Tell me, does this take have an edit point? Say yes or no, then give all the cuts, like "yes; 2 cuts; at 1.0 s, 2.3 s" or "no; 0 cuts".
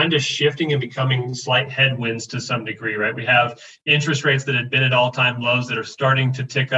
no; 0 cuts